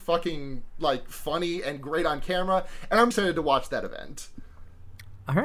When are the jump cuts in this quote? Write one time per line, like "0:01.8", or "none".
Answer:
0:03.1